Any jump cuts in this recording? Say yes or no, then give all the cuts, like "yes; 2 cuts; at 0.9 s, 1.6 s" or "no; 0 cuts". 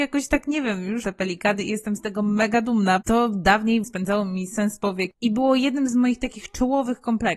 yes; 3 cuts; at 1.0 s, 3.0 s, 3.8 s